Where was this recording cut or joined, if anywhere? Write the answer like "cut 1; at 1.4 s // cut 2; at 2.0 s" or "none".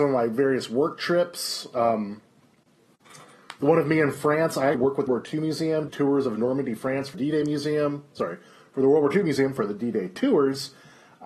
cut 1; at 4.7 s // cut 2; at 5.1 s // cut 3; at 5.9 s // cut 4; at 7.1 s